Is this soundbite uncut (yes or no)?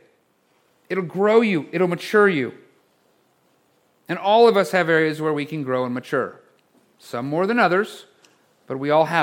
yes